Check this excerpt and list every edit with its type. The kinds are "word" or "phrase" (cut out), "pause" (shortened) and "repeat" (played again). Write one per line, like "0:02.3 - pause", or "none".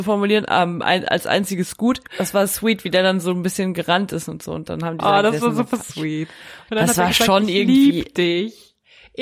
0:02.1 - pause